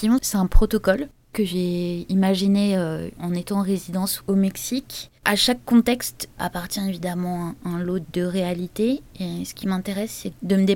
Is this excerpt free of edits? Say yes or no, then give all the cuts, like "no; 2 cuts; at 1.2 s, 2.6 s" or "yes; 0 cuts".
no; 1 cut; at 5.2 s